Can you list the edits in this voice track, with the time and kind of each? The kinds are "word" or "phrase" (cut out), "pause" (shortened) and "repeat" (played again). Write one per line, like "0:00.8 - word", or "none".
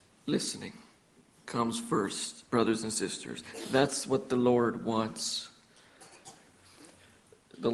0:02.5 - pause

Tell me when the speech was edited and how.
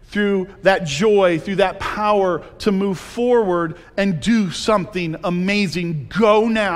none

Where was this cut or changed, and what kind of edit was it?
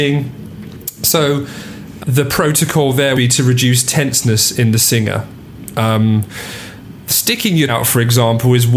0:02.0 - word
0:03.1 - word
0:07.7 - word

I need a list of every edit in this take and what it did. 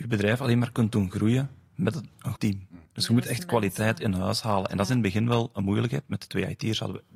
0:02.4 - word
0:02.9 - pause

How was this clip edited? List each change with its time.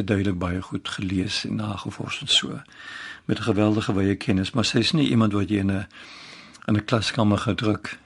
none

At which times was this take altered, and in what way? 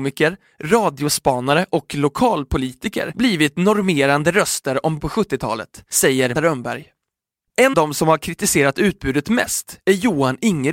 0:05.0 - word
0:06.4 - word
0:07.7 - word

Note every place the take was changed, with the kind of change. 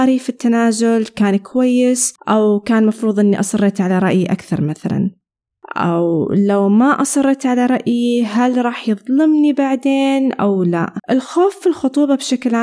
0:02.2 - pause
0:11.0 - pause

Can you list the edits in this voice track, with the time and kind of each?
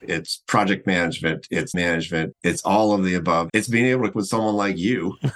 0:01.7 - word
0:02.3 - word
0:03.5 - word
0:04.1 - word

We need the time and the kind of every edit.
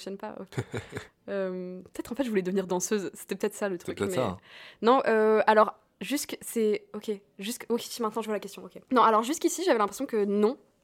0:08.8 - pause

